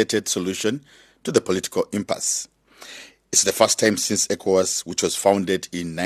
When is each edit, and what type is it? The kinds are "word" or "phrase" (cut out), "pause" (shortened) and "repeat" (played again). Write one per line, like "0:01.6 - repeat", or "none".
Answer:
none